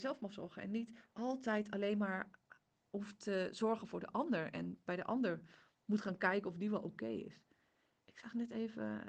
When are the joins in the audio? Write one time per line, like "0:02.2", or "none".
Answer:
none